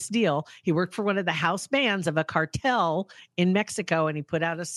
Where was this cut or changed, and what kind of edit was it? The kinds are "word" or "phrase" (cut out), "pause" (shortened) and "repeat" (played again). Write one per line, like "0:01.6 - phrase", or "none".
none